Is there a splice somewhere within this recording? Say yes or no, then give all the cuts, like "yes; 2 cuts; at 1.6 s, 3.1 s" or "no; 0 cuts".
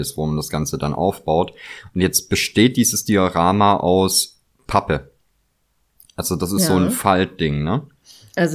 no; 0 cuts